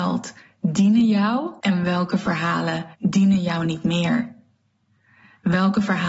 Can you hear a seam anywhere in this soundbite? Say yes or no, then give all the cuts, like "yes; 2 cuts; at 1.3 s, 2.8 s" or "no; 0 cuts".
yes; 2 cuts; at 1.6 s, 2.9 s